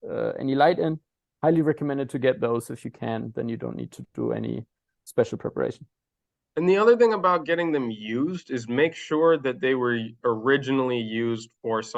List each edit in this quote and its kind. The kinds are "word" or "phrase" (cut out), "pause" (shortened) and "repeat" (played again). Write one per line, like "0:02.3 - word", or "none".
none